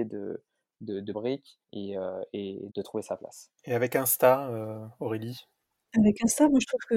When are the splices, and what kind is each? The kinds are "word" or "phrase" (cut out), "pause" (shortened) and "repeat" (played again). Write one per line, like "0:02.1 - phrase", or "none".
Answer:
0:01.1 - phrase
0:01.6 - pause
0:02.7 - word
0:03.6 - pause